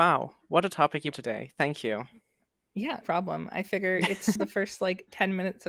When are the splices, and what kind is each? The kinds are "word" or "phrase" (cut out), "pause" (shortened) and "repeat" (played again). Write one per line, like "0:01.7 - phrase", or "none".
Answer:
0:01.1 - word
0:03.0 - word
0:04.4 - word